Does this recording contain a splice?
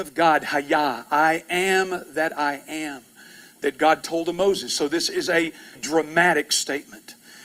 yes; 1 cut; at 5.8 s

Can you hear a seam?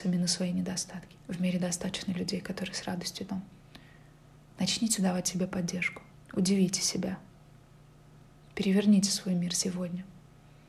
yes; 3 cuts; at 1.2 s, 3.3 s, 6.1 s

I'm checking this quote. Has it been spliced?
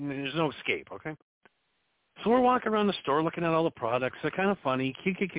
yes; 1 cut; at 1.7 s

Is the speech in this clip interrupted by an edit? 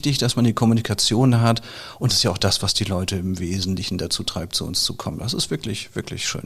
yes; 1 cut; at 2.1 s

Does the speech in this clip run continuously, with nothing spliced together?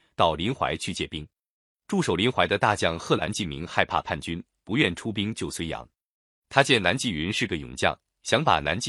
yes; 0 cuts

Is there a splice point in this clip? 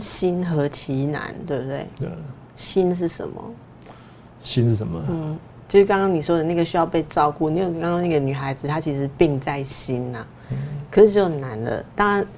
no; 0 cuts

